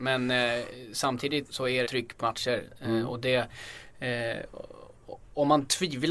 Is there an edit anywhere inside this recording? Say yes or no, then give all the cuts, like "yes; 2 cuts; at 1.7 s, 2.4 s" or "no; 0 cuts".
yes; 3 cuts; at 1.4 s, 1.9 s, 2.2 s